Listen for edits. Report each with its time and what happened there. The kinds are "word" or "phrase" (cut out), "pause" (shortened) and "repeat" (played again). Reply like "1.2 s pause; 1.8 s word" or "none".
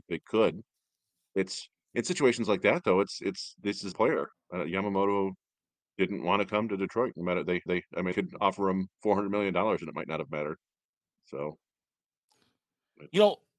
3.9 s phrase; 4.3 s pause; 7.7 s repeat; 8.1 s word; 8.9 s pause